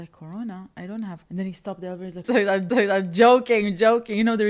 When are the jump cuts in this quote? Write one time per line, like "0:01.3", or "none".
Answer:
0:01.3
0:02.2
0:02.7